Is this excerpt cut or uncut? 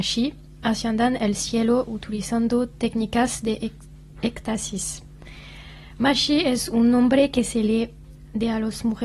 uncut